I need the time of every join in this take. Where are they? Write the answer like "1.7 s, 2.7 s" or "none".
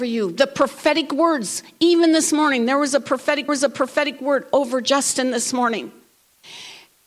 3.5 s